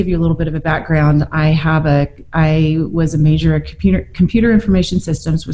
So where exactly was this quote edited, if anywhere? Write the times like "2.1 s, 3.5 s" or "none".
none